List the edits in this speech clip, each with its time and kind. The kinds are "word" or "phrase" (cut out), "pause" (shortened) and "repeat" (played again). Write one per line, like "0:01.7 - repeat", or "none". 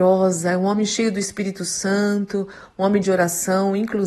none